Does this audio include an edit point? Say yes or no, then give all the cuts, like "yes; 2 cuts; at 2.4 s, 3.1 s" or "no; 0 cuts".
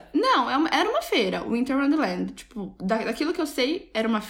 no; 0 cuts